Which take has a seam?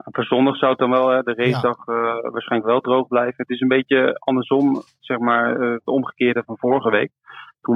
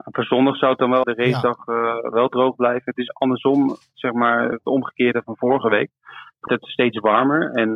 second; 5 cuts; at 1.0 s, 2.1 s, 3.1 s, 4.5 s, 6.5 s

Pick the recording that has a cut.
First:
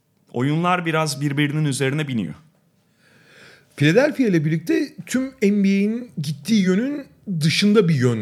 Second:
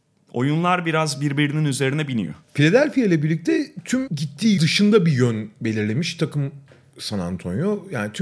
second; 3 cuts; at 2.4 s, 4.1 s, 4.6 s

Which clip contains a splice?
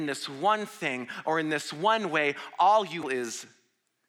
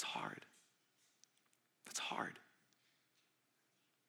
first; 1 cut; at 3.0 s

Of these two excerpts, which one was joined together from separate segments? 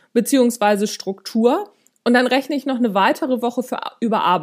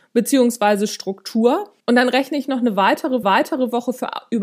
second; 2 cuts; at 1.8 s, 3.2 s

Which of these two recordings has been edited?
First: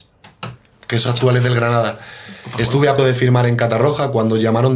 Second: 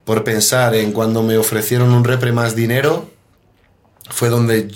first; 2 cuts; at 1.1 s, 3.0 s

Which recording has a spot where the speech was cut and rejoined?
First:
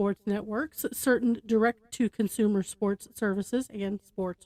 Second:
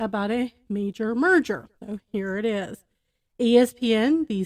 second; 1 cut; at 1.8 s

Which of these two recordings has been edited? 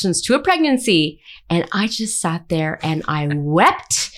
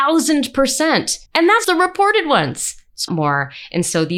second; 3 cuts; at 1.3 s, 1.6 s, 3.1 s

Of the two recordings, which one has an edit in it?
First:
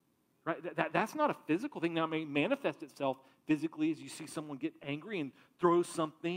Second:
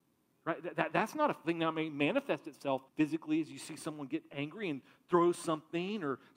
second; 2 cuts; at 1.4 s, 2.9 s

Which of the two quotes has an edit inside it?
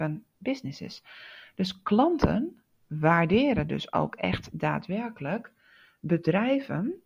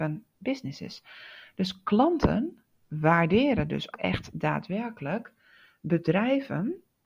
second; 1 cut; at 3.9 s

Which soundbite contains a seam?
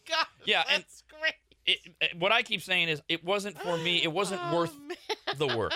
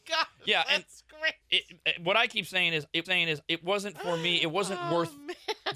second; 2 cuts; at 1.4 s, 3.0 s

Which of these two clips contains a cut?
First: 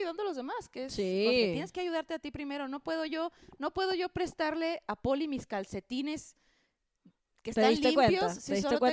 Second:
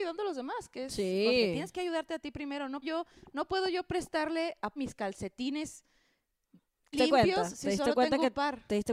second; 3 cuts; at 2.8 s, 4.8 s, 6.9 s

